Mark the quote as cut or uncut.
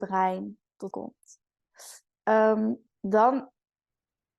cut